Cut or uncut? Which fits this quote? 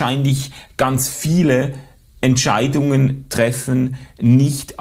uncut